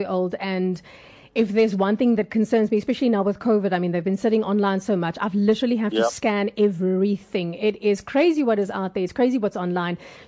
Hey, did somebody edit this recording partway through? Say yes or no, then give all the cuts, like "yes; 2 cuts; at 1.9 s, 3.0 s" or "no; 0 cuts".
no; 0 cuts